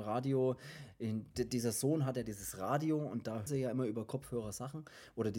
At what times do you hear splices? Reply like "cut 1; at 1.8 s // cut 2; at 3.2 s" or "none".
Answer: cut 1; at 3.5 s